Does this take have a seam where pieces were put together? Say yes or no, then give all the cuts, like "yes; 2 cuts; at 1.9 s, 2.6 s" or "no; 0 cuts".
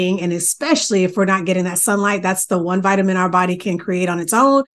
no; 0 cuts